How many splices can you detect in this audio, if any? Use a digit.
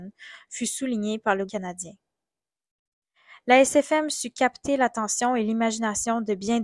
1